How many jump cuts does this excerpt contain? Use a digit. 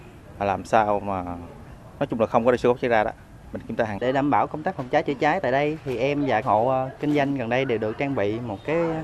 2